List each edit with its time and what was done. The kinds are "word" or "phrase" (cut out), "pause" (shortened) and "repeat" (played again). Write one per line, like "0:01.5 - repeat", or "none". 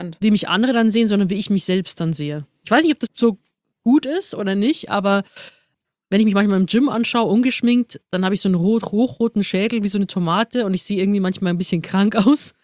0:03.1 - word